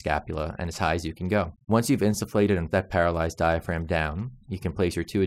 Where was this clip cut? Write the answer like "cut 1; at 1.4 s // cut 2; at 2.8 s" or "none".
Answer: cut 1; at 1.6 s // cut 2; at 2.7 s